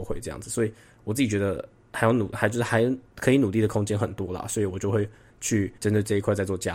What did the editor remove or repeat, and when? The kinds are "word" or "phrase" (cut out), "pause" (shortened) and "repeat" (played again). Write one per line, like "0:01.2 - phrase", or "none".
0:03.1 - pause
0:05.8 - pause